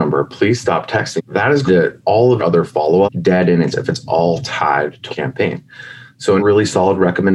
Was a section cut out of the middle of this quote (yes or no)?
yes